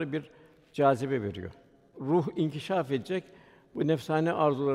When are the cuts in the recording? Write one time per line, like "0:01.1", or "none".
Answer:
none